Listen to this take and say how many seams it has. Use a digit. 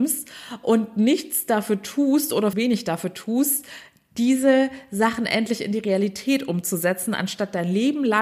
1